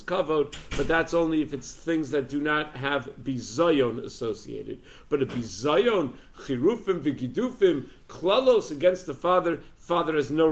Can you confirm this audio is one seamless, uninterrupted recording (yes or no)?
yes